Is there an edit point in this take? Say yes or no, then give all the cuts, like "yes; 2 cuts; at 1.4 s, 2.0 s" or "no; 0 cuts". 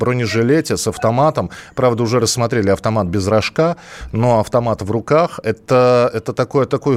no; 0 cuts